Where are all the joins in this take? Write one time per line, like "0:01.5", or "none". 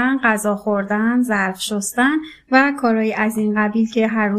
none